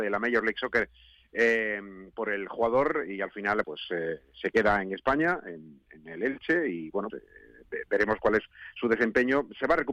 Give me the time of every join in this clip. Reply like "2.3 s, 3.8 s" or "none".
3.6 s, 7.1 s